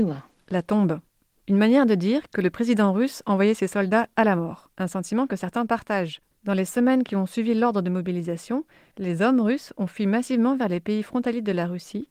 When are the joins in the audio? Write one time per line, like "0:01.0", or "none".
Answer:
0:04.7